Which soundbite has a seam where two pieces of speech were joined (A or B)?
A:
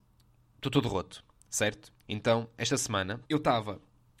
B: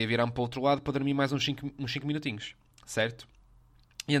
A